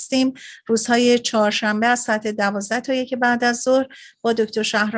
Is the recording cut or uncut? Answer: uncut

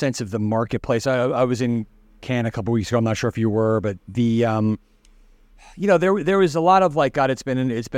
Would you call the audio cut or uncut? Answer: uncut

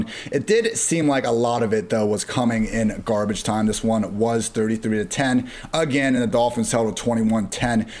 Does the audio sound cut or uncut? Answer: uncut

